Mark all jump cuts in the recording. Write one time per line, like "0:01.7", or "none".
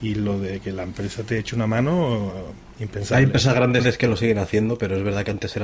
0:02.7